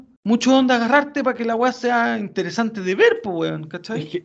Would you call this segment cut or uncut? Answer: uncut